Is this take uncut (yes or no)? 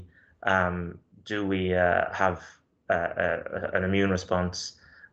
yes